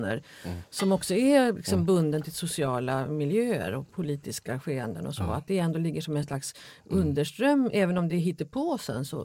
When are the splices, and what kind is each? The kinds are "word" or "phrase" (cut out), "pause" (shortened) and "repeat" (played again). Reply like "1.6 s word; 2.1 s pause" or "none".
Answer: none